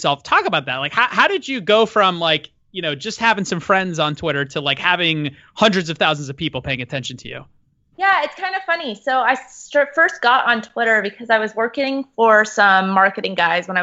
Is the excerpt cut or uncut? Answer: uncut